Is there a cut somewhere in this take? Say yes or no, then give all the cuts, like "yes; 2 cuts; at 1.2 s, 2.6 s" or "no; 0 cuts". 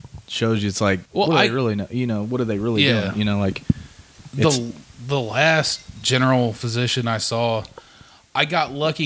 yes; 1 cut; at 1.1 s